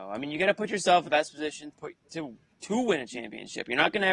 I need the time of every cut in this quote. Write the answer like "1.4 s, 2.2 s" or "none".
1.1 s, 1.7 s

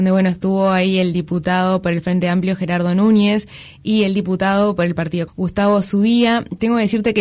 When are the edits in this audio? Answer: 5.3 s

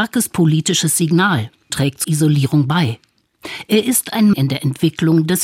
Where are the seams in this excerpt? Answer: 1.7 s, 2.0 s, 4.3 s

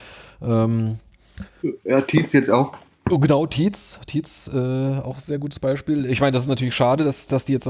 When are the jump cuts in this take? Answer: none

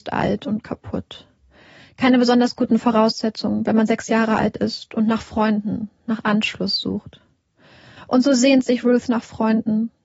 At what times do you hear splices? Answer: none

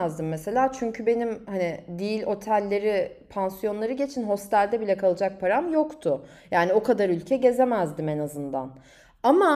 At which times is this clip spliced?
none

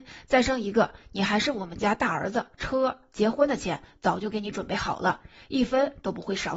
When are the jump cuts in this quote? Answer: 2.5 s

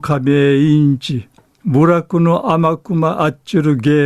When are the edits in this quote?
1.5 s

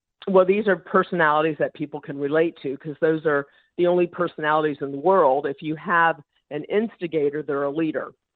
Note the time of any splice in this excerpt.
none

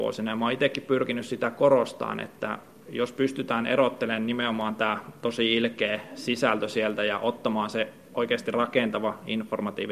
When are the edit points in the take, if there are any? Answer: none

